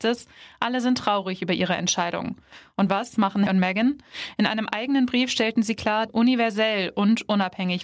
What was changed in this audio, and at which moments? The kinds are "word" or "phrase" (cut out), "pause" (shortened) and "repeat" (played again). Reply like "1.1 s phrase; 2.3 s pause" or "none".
3.5 s word; 6.1 s phrase